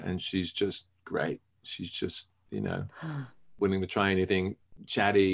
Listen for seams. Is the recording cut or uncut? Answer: uncut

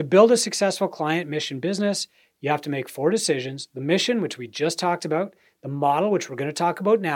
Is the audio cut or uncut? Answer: uncut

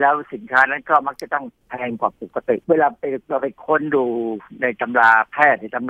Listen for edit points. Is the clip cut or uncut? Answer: cut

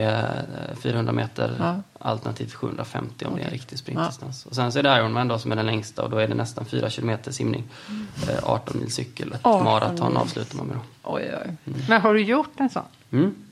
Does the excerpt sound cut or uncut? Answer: cut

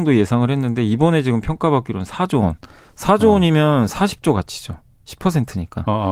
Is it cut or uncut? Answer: uncut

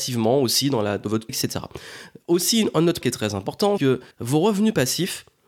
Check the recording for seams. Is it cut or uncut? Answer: cut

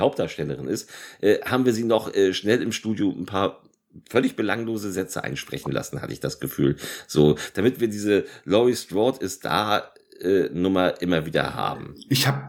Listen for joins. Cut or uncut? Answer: uncut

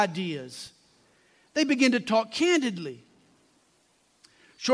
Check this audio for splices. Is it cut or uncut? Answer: uncut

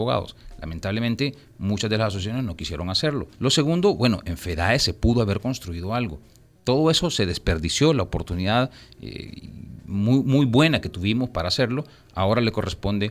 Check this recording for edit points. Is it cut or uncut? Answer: cut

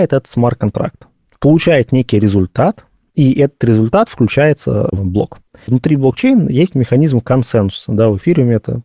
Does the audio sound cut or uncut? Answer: uncut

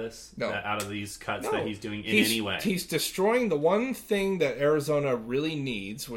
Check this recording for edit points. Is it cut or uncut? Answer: uncut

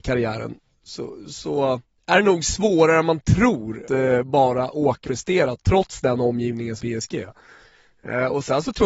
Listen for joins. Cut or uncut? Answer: cut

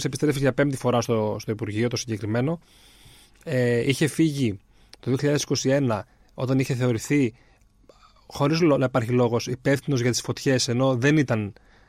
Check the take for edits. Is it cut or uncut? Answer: uncut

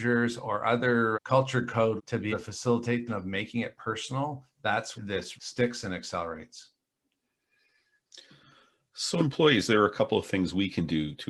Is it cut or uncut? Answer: cut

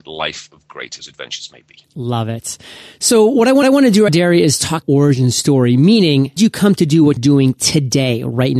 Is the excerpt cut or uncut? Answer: cut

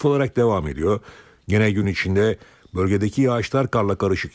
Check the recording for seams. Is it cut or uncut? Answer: uncut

